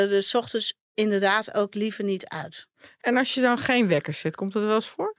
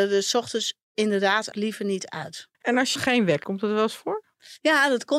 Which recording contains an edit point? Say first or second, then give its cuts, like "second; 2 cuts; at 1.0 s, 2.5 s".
second; 4 cuts; at 1.5 s, 2.5 s, 3.0 s, 3.4 s